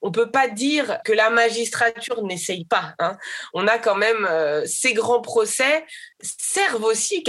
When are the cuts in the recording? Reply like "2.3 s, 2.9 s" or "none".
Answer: 6.1 s

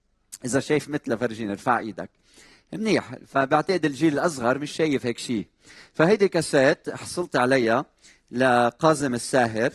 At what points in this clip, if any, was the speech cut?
none

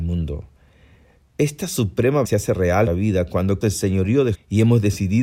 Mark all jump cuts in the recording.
2.2 s, 2.9 s, 3.6 s, 4.3 s

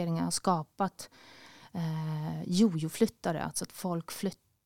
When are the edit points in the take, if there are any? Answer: none

